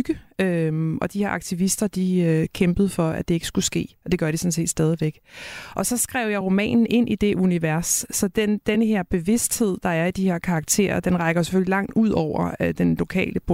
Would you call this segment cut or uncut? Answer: uncut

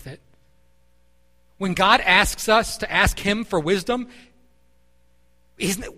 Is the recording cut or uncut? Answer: uncut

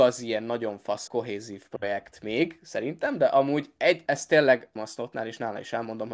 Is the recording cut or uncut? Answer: cut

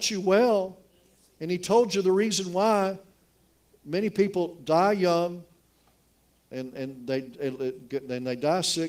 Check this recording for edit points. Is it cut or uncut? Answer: uncut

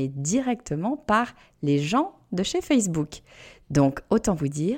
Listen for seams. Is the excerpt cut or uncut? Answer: uncut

